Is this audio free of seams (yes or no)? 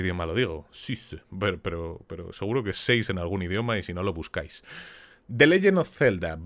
yes